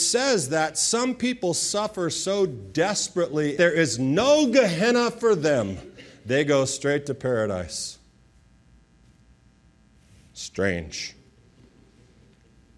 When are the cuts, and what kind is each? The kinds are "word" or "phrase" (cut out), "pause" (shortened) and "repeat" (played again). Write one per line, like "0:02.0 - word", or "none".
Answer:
0:03.6 - phrase